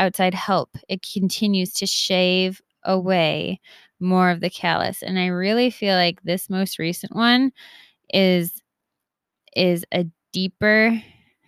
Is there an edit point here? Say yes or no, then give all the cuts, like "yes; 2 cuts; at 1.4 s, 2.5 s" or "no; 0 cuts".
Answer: no; 0 cuts